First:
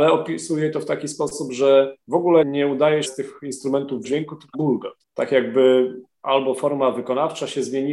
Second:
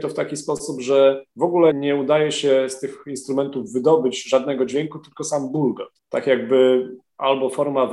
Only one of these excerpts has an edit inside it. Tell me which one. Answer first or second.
first